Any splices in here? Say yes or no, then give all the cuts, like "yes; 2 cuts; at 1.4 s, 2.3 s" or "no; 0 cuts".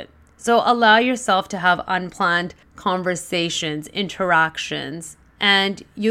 yes; 1 cut; at 2.6 s